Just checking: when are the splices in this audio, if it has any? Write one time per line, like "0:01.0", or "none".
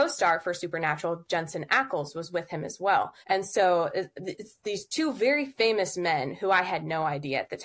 0:03.2